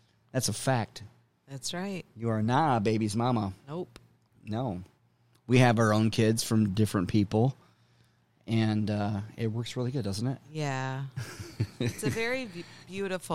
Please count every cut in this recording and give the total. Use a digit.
0